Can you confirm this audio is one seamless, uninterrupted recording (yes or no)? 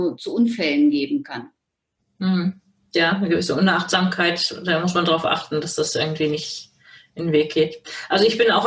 yes